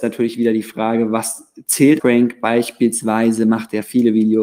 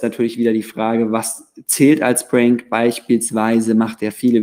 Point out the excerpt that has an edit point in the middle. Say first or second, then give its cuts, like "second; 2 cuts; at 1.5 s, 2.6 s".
first; 1 cut; at 2.0 s